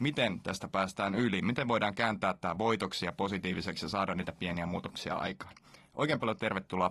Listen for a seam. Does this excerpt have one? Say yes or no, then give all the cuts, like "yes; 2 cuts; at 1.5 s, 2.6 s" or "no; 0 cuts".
no; 0 cuts